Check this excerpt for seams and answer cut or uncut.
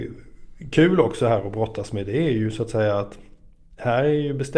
uncut